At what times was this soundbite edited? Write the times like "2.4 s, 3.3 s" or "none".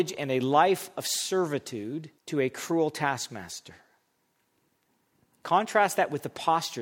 2.2 s